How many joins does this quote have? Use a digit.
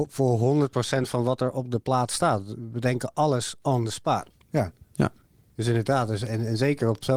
0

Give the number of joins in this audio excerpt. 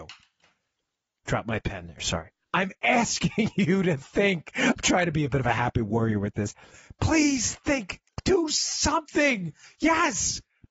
0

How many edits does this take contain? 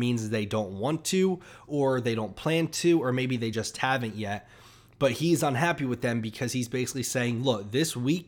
0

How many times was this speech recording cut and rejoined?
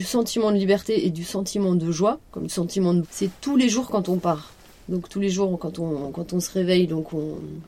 2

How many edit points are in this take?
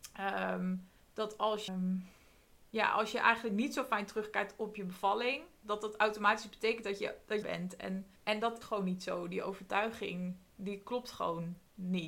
5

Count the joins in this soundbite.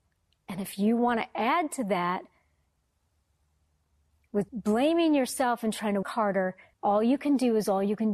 3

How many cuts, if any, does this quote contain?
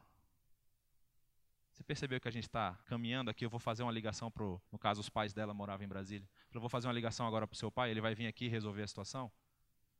2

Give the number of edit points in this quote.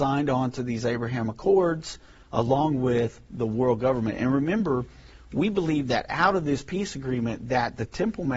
0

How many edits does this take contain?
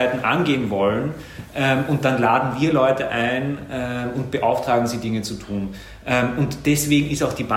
0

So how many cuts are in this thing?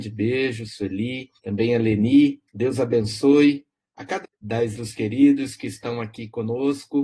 4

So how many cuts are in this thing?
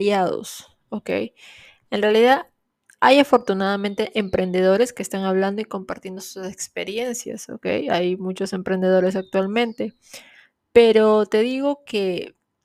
0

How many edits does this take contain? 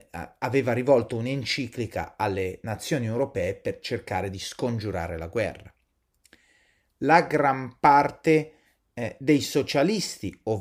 0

